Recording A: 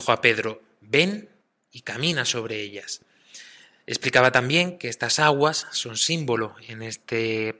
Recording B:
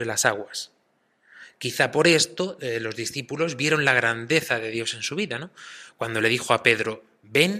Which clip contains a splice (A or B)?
A